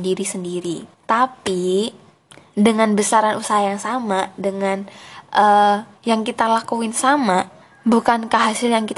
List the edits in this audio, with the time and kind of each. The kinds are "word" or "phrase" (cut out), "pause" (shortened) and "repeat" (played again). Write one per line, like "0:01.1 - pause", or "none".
0:00.9 - pause
0:05.9 - pause
0:07.6 - pause